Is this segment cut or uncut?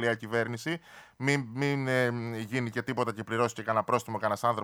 uncut